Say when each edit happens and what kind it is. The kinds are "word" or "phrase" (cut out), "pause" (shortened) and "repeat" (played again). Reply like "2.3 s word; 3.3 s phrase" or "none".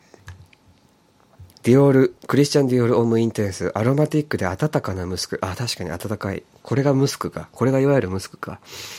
1.5 s pause; 2.2 s pause